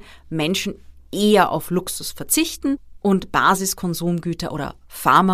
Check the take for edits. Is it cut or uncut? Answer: uncut